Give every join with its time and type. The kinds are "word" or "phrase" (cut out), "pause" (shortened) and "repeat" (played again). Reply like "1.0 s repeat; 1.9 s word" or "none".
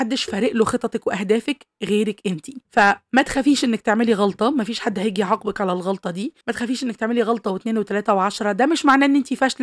2.6 s pause; 6.4 s pause